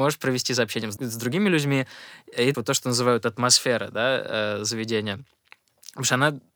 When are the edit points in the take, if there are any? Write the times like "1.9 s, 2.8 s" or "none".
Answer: 1.0 s, 2.5 s